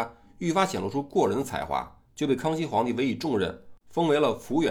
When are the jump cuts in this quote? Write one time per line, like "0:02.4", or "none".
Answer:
0:02.1
0:03.8